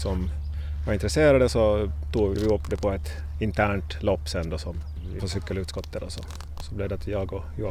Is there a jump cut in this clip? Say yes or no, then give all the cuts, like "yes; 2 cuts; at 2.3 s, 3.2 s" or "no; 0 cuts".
yes; 2 cuts; at 2.4 s, 5.2 s